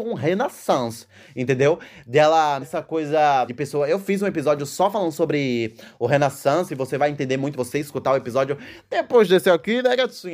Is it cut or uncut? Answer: cut